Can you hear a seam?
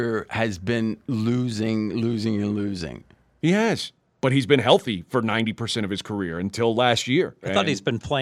no; 0 cuts

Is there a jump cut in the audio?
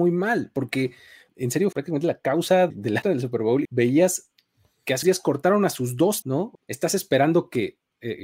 yes; 8 cuts; at 1.3 s, 1.7 s, 2.7 s, 3.0 s, 3.6 s, 5.0 s, 6.2 s, 6.5 s

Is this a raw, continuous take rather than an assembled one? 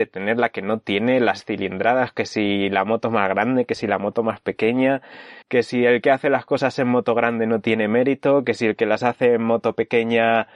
no; 1 cut; at 5.4 s

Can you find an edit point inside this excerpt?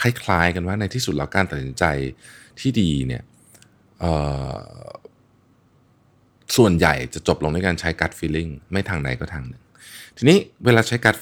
no; 0 cuts

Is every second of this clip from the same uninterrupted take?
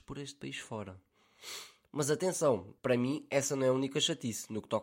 no; 1 cut; at 2.8 s

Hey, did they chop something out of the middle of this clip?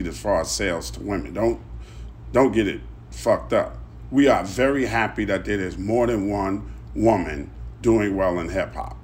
no; 0 cuts

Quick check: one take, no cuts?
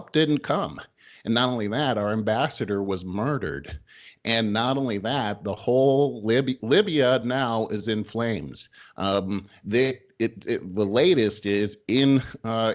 yes; 0 cuts

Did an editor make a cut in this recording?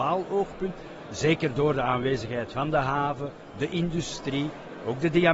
no; 0 cuts

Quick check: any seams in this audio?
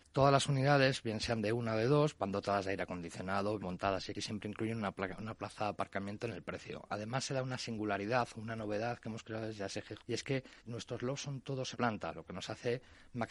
yes; 5 cuts; at 3.6 s, 4.1 s, 10.0 s, 10.6 s, 11.7 s

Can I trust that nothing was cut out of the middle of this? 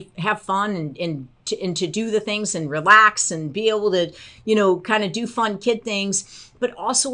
yes; 0 cuts

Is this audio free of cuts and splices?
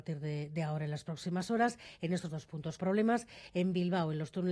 no; 2 cuts; at 2.3 s, 2.8 s

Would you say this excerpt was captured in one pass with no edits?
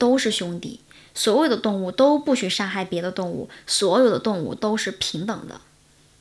yes; 0 cuts

